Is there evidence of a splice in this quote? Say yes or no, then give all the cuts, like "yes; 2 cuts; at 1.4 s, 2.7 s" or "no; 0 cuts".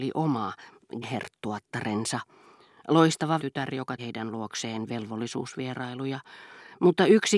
yes; 3 cuts; at 1.0 s, 3.4 s, 4.0 s